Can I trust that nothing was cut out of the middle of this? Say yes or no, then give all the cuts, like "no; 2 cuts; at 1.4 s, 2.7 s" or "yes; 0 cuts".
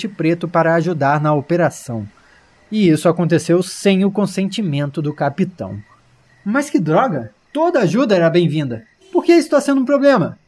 yes; 0 cuts